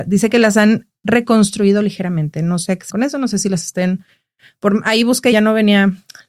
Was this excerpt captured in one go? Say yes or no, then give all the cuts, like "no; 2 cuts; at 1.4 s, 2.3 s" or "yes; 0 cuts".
no; 3 cuts; at 2.9 s, 3.6 s, 5.3 s